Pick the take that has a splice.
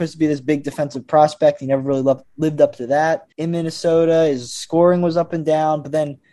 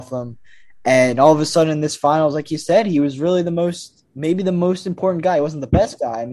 first; 1 cut; at 3.3 s

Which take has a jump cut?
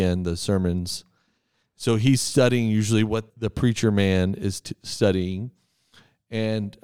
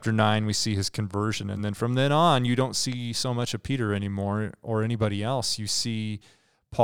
first; 1 cut; at 3.3 s

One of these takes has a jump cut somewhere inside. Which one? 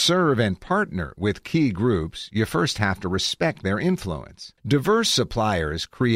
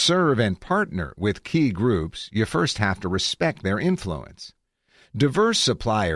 first; 1 cut; at 4.6 s

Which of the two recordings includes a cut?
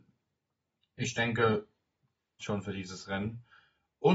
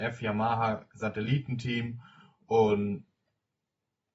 first; 1 cut; at 2.4 s

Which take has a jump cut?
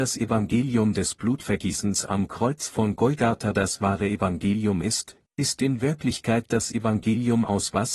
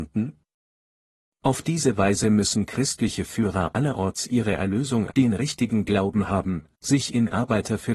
second; 1 cut; at 5.1 s

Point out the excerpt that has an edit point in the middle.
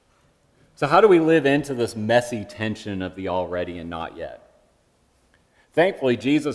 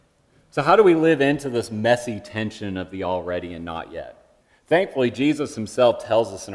second; 1 cut; at 4.4 s

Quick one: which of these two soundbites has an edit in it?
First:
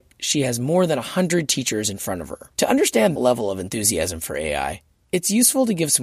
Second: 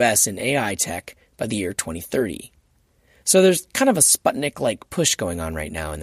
first; 2 cuts; at 2.5 s, 3.2 s

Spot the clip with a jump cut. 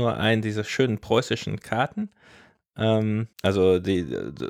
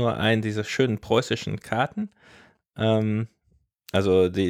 first; 1 cut; at 3.3 s

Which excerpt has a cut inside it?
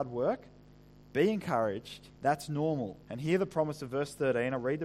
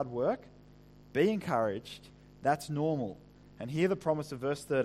first; 2 cuts; at 2.2 s, 3.0 s

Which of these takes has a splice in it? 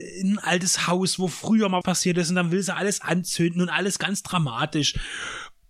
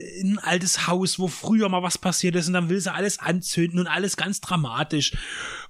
first; 1 cut; at 1.8 s

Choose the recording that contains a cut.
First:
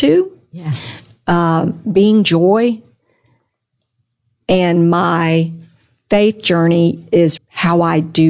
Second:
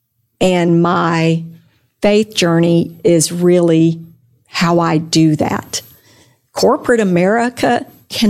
first; 1 cut; at 7.4 s

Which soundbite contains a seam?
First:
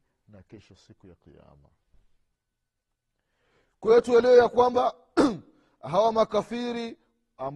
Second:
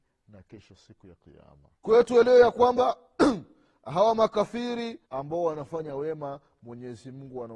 second; 2 cuts; at 1.8 s, 5.1 s

